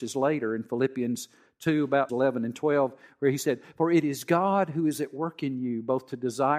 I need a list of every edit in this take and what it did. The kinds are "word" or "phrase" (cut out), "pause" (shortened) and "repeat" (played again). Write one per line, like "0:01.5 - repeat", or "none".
0:02.1 - word